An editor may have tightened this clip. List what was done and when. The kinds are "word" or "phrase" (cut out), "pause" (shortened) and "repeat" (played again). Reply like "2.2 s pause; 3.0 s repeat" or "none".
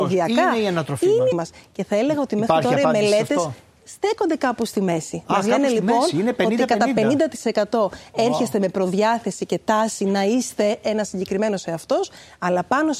1.3 s word